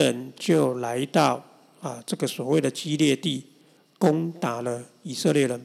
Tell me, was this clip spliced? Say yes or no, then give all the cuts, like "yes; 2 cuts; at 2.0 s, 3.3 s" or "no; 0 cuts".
no; 0 cuts